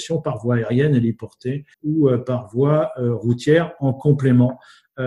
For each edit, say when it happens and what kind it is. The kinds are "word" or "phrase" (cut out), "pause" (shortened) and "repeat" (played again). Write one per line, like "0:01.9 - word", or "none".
0:01.7 - pause

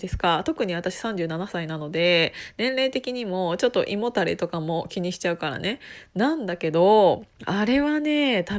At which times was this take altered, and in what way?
0:07.3 - pause

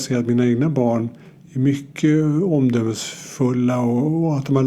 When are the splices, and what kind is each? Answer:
none

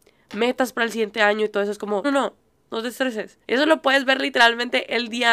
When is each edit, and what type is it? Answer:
0:02.0 - word
0:03.4 - pause

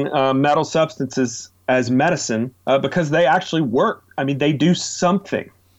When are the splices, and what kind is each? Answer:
0:02.6 - pause

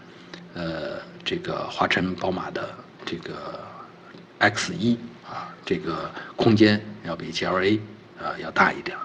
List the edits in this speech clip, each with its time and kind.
none

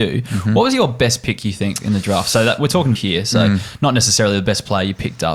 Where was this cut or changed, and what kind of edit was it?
0:02.9 - word

